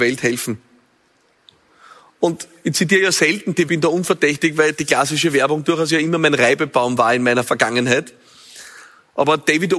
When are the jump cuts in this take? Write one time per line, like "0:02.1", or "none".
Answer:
0:03.7